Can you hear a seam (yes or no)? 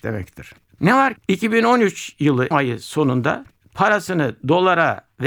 yes